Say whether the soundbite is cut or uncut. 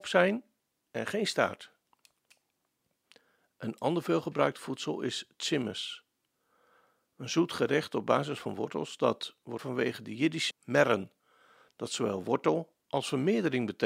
cut